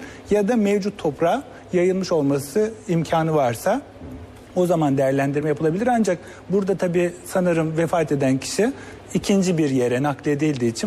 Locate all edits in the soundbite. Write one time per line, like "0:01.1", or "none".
none